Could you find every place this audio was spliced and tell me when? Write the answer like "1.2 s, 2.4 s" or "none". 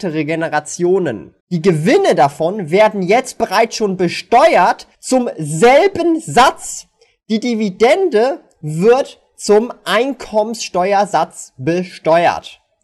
1.4 s, 4.9 s